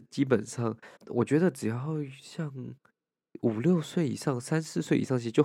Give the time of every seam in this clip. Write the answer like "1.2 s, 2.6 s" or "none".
1.0 s